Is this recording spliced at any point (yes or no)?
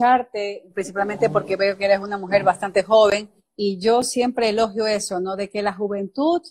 no